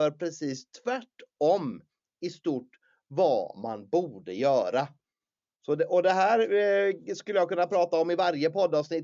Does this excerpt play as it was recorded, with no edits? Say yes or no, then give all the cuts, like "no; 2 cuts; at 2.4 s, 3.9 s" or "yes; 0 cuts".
yes; 0 cuts